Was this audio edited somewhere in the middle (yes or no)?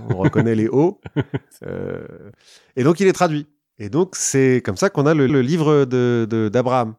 yes